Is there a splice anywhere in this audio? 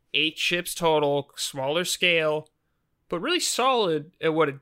no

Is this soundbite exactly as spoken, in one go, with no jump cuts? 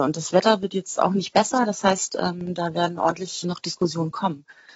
no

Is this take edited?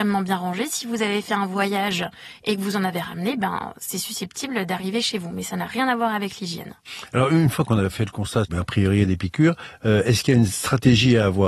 no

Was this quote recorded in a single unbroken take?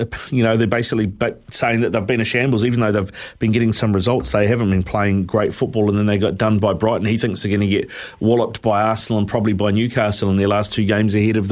yes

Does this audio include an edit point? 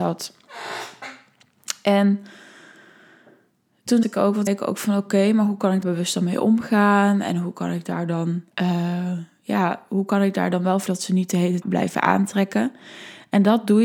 yes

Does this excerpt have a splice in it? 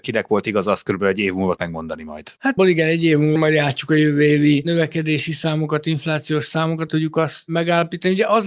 yes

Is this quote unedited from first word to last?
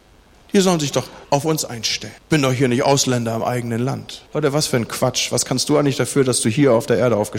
no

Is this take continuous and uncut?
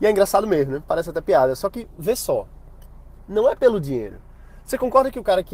yes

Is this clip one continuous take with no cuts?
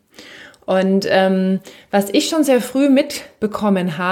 yes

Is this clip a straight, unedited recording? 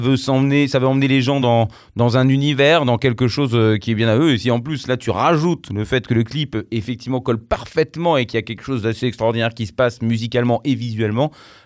yes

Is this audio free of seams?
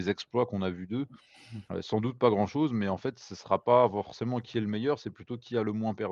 no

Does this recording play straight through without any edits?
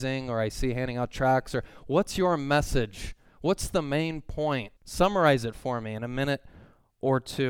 no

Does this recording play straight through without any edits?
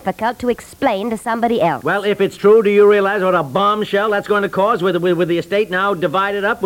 yes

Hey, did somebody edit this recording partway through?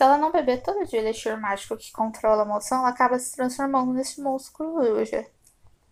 no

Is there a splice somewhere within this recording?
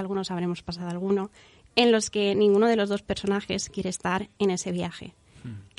no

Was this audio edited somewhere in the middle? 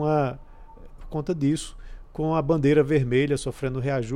yes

